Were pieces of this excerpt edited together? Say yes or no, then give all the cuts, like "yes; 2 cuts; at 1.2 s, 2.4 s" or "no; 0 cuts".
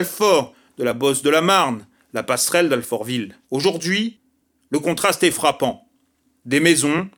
yes; 1 cut; at 3.4 s